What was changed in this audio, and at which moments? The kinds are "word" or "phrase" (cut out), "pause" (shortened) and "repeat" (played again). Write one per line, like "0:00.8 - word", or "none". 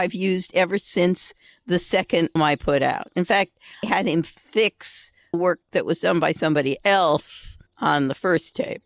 0:02.4 - word
0:03.8 - word
0:05.3 - word
0:07.7 - pause